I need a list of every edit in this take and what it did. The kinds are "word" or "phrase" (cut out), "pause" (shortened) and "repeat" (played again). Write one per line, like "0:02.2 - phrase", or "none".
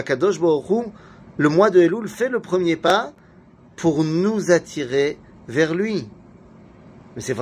none